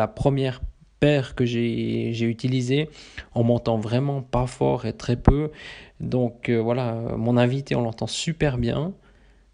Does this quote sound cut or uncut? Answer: cut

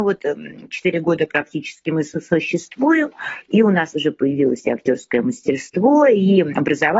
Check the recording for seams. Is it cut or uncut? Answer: uncut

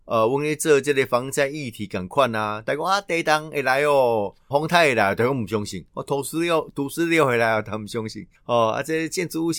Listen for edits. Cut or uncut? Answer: cut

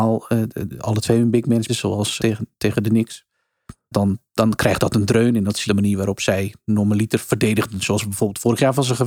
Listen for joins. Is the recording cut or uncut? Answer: cut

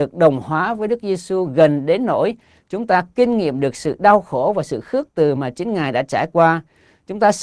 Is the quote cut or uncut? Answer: uncut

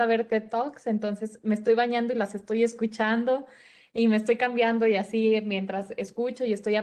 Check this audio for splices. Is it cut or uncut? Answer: uncut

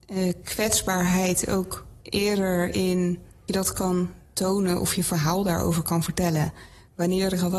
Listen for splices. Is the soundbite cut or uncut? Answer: cut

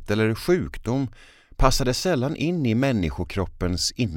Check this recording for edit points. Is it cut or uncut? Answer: uncut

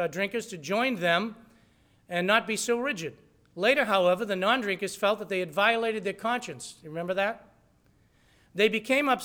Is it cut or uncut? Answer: uncut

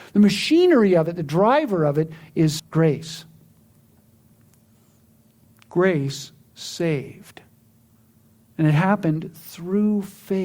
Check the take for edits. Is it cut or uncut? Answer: cut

